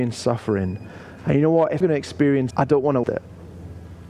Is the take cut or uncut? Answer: cut